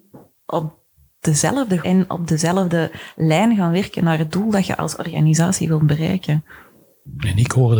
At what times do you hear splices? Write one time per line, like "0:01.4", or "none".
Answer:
0:01.8